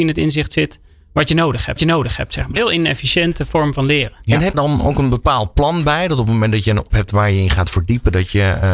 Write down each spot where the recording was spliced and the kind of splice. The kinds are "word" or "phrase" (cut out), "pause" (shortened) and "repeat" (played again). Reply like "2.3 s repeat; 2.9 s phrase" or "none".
1.8 s repeat; 2.6 s word; 4.5 s phrase; 6.9 s word